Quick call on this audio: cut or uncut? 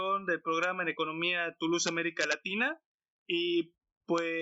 uncut